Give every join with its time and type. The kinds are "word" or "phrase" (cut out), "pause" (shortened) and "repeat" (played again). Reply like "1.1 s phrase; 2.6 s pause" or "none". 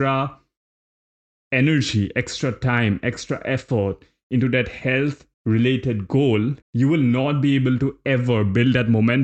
5.3 s pause; 6.6 s pause